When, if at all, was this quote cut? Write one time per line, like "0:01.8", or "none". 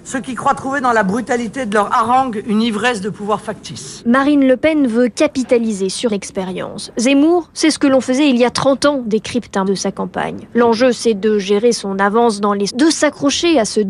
0:06.1
0:09.7
0:12.7